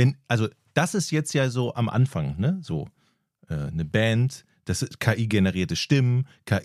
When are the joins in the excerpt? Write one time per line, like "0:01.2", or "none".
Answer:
none